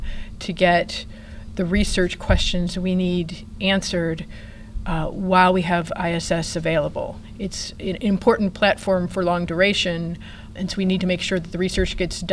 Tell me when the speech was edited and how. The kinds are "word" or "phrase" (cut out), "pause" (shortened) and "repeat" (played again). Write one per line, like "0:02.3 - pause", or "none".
0:10.6 - word